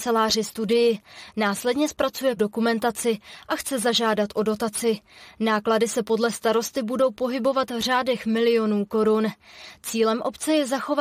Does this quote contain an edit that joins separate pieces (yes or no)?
yes